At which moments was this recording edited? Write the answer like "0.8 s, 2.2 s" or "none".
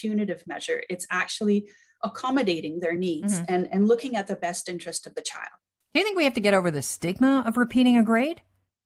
none